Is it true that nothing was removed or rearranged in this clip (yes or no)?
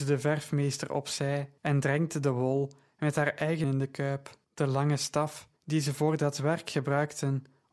no